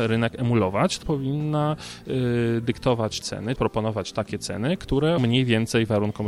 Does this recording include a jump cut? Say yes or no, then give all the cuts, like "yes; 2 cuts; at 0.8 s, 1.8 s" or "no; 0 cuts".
yes; 4 cuts; at 1.0 s, 3.2 s, 3.6 s, 5.2 s